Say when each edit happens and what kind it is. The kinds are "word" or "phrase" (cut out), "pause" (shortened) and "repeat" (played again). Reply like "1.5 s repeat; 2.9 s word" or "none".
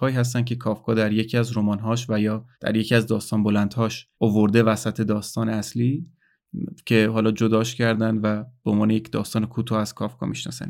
2.5 s pause; 4.1 s pause